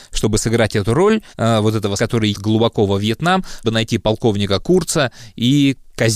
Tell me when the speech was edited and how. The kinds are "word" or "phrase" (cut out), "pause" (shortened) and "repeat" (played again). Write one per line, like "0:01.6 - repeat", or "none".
0:01.3 - pause
0:02.0 - word
0:02.3 - word
0:03.6 - word